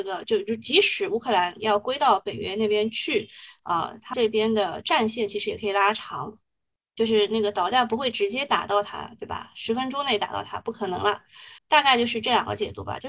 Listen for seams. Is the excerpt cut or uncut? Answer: cut